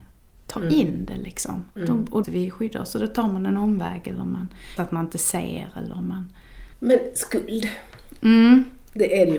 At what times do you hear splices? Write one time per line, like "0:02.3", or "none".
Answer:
0:01.7
0:02.2
0:04.8
0:06.7